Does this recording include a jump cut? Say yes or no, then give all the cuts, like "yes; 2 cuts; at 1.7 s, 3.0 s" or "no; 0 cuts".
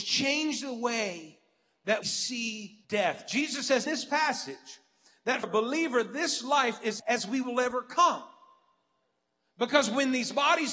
yes; 5 cuts; at 2.0 s, 2.8 s, 3.9 s, 5.4 s, 7.0 s